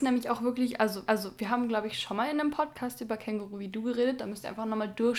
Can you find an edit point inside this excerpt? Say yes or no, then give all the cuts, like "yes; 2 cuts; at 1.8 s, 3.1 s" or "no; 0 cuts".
yes; 1 cut; at 1.1 s